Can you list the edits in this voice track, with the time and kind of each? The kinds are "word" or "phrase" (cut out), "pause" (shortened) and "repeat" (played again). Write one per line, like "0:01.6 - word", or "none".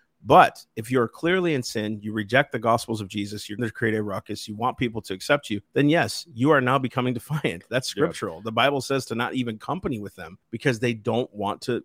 0:03.6 - phrase
0:05.7 - pause
0:10.4 - pause